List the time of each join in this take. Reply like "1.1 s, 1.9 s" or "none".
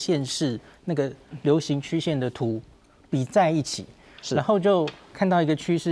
none

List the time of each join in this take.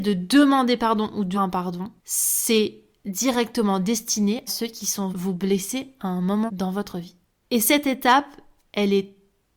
1.3 s, 2.0 s, 4.5 s, 5.1 s, 6.5 s, 7.2 s

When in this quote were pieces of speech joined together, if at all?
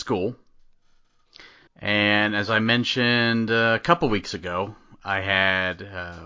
1.7 s

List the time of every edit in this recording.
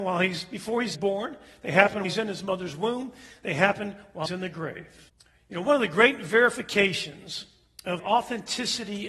0.9 s, 2.0 s, 4.3 s, 5.1 s, 8.0 s

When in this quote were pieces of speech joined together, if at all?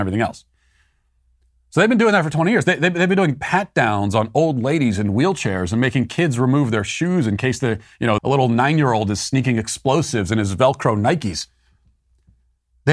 8.2 s

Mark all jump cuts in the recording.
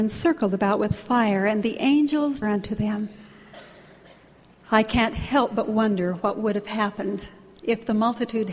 2.4 s

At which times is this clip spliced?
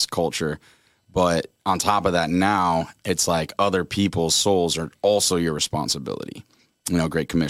3.0 s

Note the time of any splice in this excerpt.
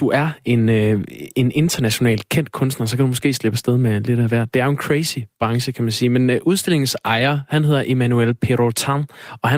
none

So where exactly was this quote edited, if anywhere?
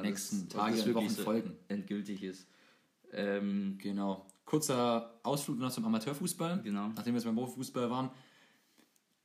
none

